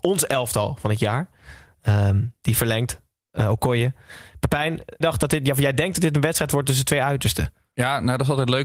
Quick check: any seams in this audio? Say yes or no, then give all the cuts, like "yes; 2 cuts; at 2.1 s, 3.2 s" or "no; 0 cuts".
yes; 1 cut; at 5.0 s